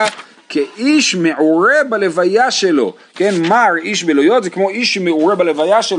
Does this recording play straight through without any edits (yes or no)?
yes